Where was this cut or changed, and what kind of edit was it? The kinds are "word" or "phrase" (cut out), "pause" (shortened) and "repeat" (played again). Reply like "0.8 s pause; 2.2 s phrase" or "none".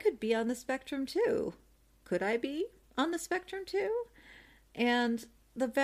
none

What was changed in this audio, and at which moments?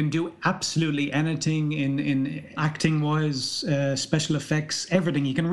2.6 s phrase

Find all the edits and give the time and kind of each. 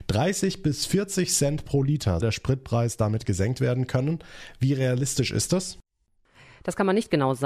2.2 s word

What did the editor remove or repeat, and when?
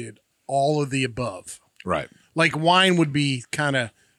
none

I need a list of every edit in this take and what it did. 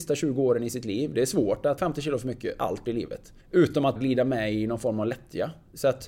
1.8 s word; 2.9 s phrase; 3.4 s pause; 4.0 s word

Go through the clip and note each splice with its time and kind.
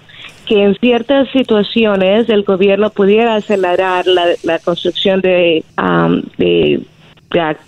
5.7 s pause

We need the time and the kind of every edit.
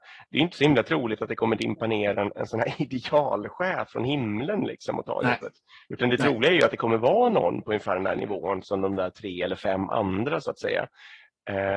none

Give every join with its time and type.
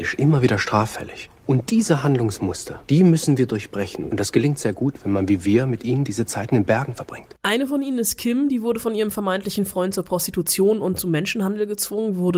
2.8 s pause

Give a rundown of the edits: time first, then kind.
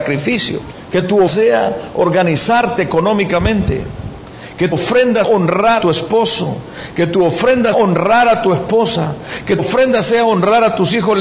1.3 s word; 4.7 s word; 5.2 s word; 5.8 s word; 7.7 s word; 9.6 s word

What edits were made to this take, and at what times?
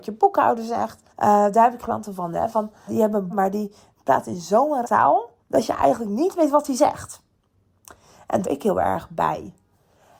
1.1 s pause; 1.8 s phrase; 2.9 s word; 3.3 s word; 4.8 s word; 5.4 s pause; 8.4 s phrase

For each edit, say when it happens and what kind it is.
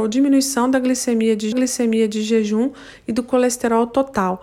1.5 s repeat

